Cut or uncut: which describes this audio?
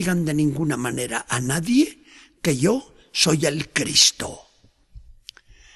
uncut